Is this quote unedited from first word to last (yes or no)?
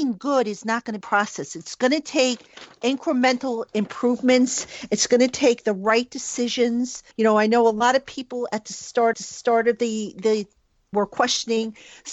no